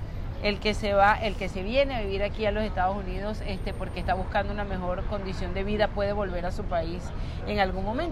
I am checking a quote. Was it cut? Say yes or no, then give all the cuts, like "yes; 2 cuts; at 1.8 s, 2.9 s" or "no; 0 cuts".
no; 0 cuts